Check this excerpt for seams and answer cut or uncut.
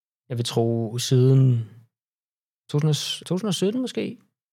cut